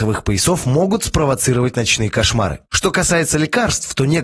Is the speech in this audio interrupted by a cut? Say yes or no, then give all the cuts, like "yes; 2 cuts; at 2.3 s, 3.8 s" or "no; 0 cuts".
no; 0 cuts